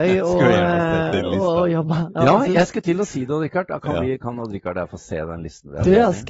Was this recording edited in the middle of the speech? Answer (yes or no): no